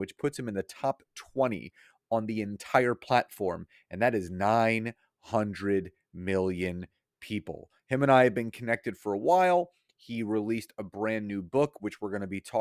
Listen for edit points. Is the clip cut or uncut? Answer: uncut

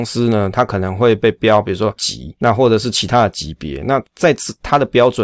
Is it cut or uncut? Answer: cut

